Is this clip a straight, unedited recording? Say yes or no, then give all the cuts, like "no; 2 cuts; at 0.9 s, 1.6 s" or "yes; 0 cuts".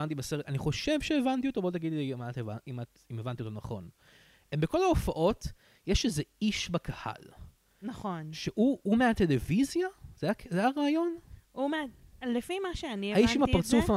yes; 0 cuts